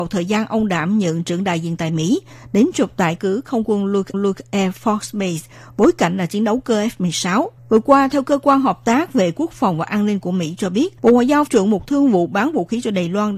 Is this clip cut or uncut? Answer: cut